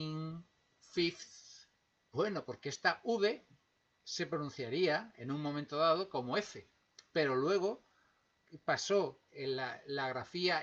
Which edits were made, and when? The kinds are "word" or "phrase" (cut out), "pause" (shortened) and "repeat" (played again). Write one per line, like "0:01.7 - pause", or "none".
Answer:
0:02.0 - pause
0:09.3 - word